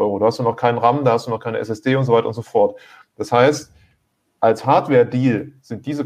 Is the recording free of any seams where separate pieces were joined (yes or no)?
yes